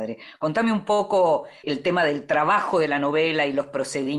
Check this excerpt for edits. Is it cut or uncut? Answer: cut